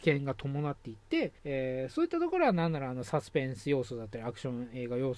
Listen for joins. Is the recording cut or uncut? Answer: cut